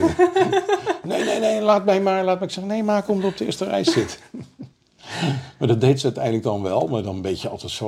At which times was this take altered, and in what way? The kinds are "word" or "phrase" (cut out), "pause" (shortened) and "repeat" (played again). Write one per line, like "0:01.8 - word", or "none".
0:04.7 - pause

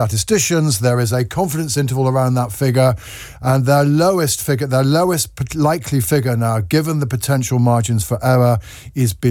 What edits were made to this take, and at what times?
none

